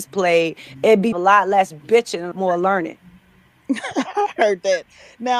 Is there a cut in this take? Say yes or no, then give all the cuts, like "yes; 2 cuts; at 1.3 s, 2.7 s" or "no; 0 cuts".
yes; 3 cuts; at 1.1 s, 2.3 s, 3.5 s